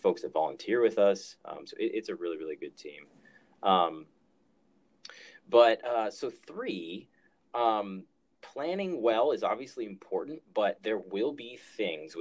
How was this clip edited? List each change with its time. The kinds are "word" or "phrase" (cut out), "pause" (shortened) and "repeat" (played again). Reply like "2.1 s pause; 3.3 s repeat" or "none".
none